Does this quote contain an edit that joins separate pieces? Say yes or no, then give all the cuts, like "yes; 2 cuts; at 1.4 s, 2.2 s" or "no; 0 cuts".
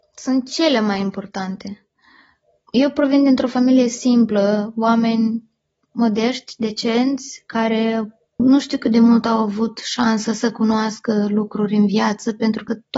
no; 0 cuts